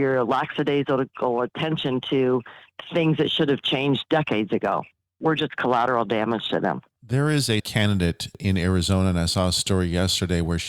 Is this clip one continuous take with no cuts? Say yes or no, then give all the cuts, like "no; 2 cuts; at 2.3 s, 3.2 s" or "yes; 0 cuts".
no; 2 cuts; at 4.9 s, 6.9 s